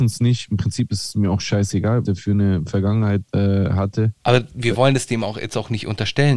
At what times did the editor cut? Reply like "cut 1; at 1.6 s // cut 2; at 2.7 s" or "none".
cut 1; at 2.0 s // cut 2; at 3.3 s // cut 3; at 4.2 s